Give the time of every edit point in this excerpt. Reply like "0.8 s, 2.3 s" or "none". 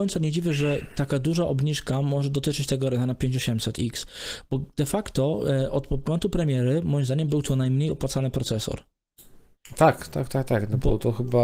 none